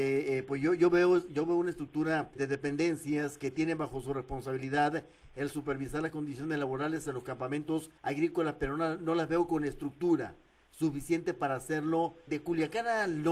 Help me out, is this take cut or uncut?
cut